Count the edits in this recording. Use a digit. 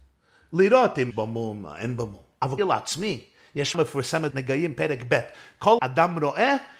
5